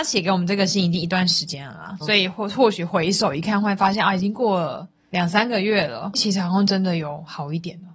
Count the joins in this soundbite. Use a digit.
2